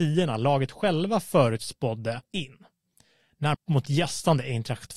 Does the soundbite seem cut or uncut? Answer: cut